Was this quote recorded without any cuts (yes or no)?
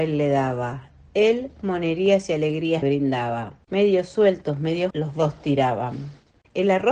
no